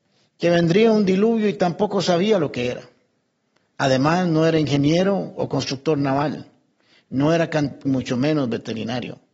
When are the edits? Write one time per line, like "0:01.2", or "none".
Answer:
0:07.8